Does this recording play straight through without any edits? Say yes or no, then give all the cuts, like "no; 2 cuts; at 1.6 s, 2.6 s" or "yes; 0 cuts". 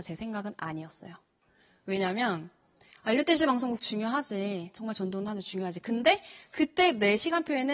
yes; 0 cuts